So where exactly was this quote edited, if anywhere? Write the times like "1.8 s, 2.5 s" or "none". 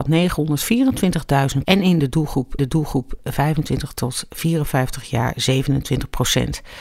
1.6 s, 2.6 s

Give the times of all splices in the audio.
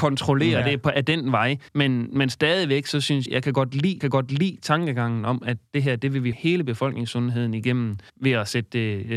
1.7 s, 3.3 s, 4.0 s, 6.3 s, 8.1 s

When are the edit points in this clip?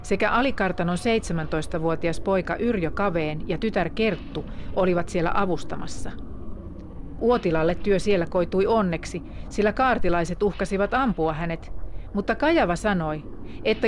none

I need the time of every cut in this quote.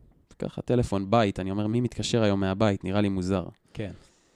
none

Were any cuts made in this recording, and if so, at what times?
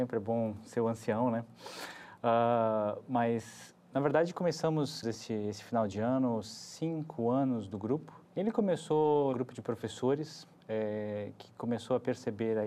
5.0 s, 8.2 s, 9.3 s

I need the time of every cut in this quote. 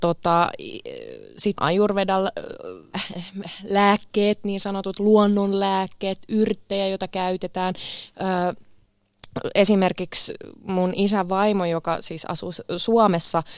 1.6 s, 2.9 s

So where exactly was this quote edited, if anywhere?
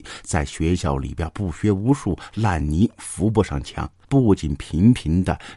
3.9 s

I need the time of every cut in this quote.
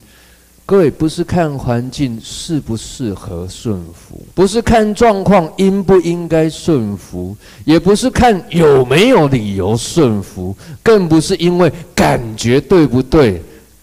4.3 s

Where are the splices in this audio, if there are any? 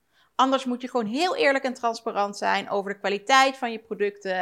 none

